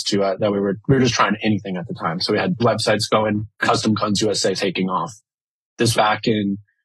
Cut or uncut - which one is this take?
cut